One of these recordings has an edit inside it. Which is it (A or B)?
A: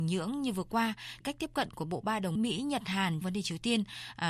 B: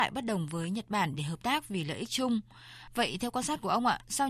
A